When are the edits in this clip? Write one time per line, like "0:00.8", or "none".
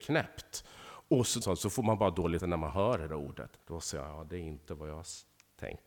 0:01.4
0:02.4
0:03.1
0:03.6